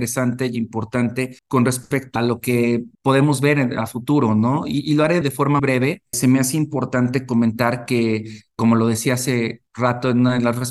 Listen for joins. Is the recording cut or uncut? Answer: cut